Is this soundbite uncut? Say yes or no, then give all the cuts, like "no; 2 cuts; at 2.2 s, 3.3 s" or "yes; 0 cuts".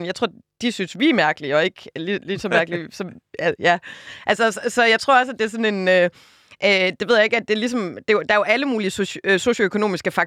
yes; 0 cuts